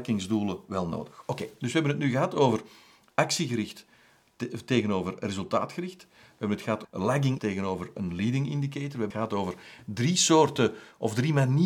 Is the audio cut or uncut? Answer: cut